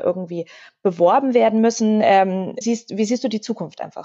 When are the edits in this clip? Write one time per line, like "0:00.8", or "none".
0:02.6